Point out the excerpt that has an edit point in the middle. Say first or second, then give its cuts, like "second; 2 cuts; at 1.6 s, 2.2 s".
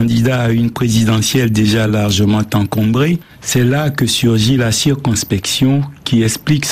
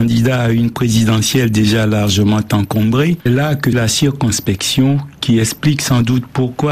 second; 2 cuts; at 3.3 s, 3.7 s